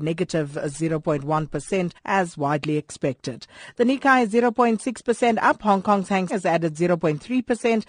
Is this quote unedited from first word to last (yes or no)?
no